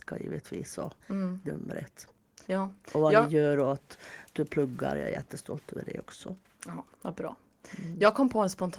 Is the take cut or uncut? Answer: cut